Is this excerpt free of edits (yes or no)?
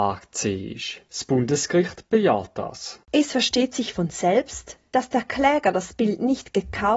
yes